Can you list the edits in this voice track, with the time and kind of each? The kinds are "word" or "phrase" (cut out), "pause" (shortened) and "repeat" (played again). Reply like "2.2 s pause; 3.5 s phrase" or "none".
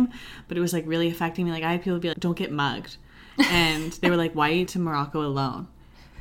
2.1 s word; 4.7 s word